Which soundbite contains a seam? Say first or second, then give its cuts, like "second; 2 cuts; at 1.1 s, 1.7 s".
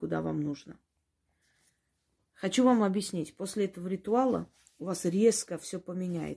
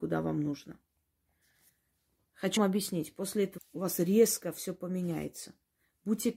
second; 2 cuts; at 2.6 s, 3.6 s